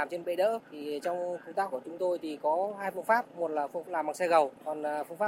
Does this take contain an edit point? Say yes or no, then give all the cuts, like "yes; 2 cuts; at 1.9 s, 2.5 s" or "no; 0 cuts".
yes; 2 cuts; at 1.7 s, 3.8 s